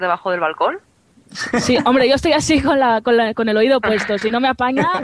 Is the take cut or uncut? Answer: uncut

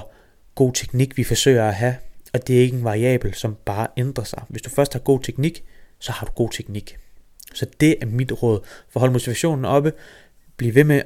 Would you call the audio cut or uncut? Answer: cut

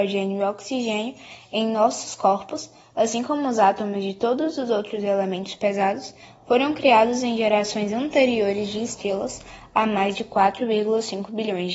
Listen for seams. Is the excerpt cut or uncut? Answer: uncut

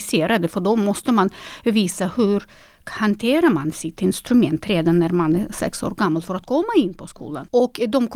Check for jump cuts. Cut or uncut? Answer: uncut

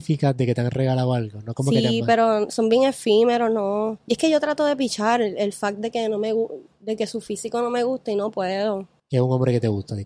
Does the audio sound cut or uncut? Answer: cut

